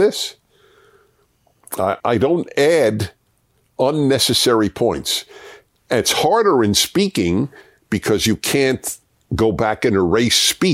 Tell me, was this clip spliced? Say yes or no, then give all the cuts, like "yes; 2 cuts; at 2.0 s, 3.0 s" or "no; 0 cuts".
yes; 1 cut; at 2.0 s